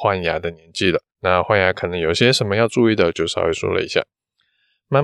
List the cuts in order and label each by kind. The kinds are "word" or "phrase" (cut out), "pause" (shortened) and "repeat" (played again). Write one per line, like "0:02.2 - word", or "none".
0:01.1 - pause